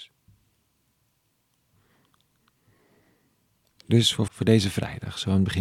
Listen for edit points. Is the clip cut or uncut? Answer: cut